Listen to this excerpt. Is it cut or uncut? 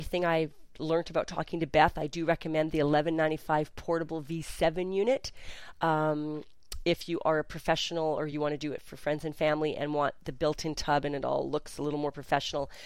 uncut